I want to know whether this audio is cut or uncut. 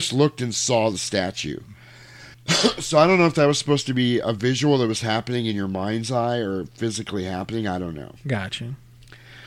cut